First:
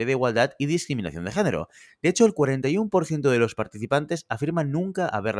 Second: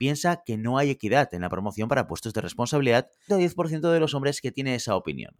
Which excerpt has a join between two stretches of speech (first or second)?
second